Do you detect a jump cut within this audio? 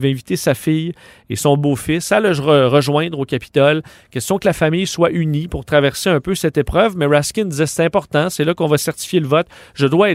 no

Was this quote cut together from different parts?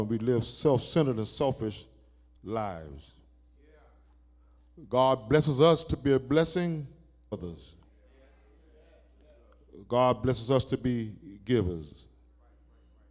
yes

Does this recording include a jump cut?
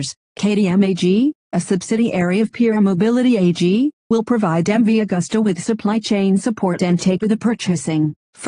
yes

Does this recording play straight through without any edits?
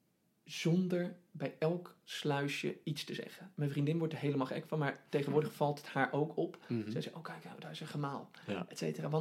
yes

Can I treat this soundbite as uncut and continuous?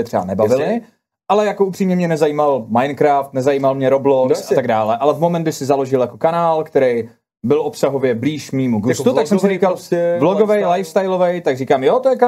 yes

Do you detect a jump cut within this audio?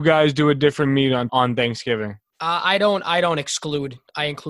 no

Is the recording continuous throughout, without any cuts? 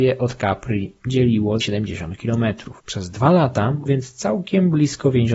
no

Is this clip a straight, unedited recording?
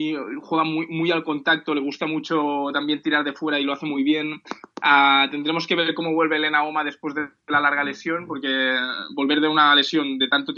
yes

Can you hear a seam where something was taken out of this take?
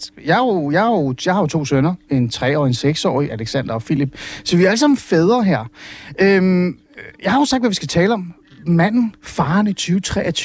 no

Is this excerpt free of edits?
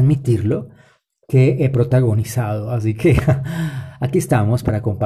yes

